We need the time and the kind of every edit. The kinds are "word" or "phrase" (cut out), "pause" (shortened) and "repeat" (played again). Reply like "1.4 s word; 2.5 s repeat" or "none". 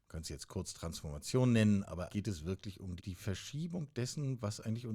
2.1 s word; 3.0 s word